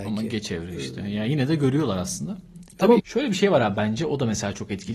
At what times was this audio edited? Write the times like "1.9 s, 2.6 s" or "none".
3.0 s